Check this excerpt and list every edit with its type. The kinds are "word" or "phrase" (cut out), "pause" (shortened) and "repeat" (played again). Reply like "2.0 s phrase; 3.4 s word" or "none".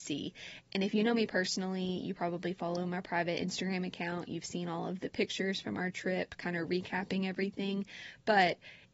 none